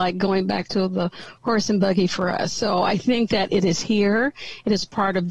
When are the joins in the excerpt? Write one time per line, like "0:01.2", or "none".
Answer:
none